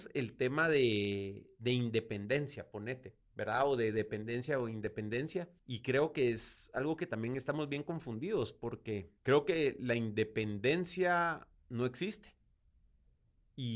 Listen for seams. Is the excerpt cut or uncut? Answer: cut